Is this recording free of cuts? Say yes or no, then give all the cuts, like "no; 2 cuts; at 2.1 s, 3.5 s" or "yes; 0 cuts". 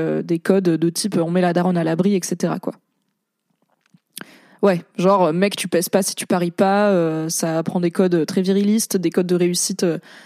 yes; 0 cuts